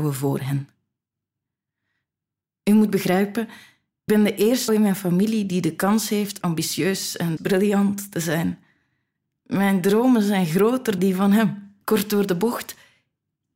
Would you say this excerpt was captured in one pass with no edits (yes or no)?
no